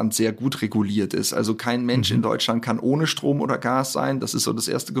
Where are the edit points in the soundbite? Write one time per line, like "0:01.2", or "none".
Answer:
none